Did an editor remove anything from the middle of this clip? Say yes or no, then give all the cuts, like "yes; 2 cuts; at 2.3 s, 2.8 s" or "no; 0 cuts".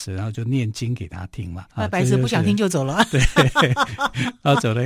yes; 1 cut; at 1.7 s